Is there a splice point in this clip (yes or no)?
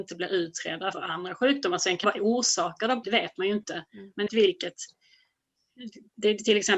yes